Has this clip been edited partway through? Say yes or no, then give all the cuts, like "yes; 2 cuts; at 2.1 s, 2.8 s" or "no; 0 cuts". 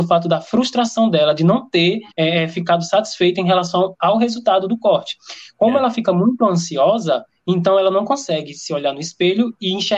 yes; 1 cut; at 2.1 s